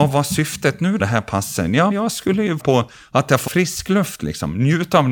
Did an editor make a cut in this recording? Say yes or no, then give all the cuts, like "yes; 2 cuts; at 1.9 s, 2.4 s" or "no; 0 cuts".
yes; 4 cuts; at 1.0 s, 1.9 s, 2.6 s, 3.5 s